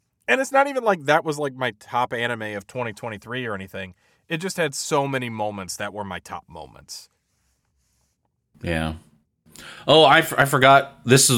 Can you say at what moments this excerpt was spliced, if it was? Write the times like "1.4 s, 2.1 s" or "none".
none